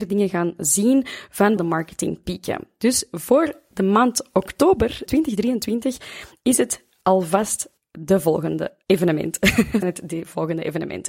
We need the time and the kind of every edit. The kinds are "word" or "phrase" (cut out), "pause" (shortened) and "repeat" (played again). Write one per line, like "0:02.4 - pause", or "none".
0:01.6 - word
0:05.1 - word
0:08.8 - pause
0:09.8 - word